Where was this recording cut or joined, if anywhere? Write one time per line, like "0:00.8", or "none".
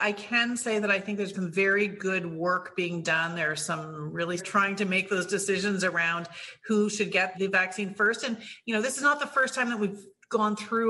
0:01.3
0:04.4
0:07.3